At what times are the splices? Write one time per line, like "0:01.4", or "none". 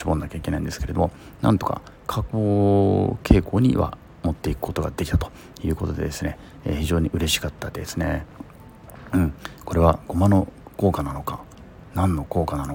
0:02.0

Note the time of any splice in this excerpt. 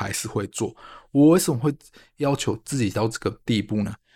none

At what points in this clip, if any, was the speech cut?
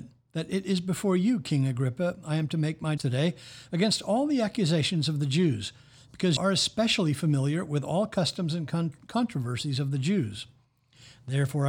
0:03.0
0:06.4

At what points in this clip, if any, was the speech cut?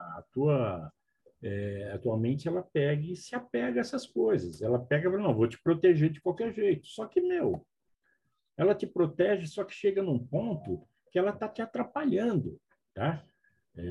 none

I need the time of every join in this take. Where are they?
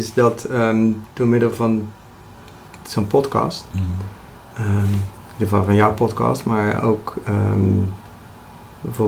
0:01.1

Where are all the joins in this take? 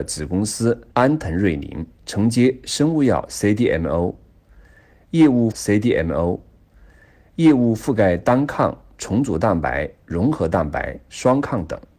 0:00.9
0:02.0
0:05.5

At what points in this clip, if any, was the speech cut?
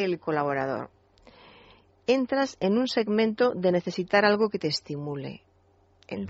none

